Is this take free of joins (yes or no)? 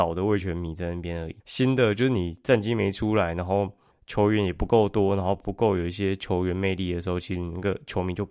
no